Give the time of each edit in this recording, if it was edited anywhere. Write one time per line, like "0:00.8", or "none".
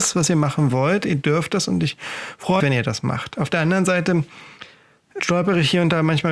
0:02.6
0:05.2

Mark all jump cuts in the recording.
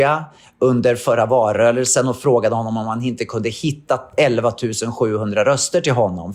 none

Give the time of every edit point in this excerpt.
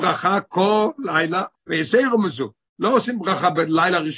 0:01.5

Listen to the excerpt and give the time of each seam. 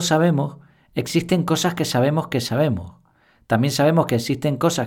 none

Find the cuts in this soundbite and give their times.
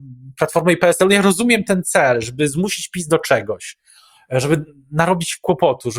none

